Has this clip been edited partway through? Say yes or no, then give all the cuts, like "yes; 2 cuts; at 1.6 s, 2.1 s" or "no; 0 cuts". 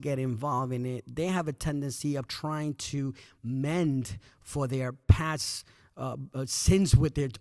no; 0 cuts